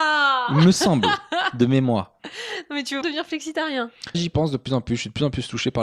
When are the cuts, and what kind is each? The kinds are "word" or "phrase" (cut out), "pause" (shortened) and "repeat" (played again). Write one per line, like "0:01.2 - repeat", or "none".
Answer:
0:03.0 - word
0:04.1 - word